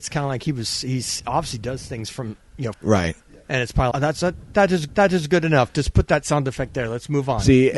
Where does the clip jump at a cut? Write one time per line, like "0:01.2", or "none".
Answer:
0:01.2
0:02.7
0:03.9
0:04.9